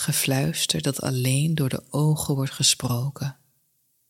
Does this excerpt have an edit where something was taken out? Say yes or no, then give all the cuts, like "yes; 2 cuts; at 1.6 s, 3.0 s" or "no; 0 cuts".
no; 0 cuts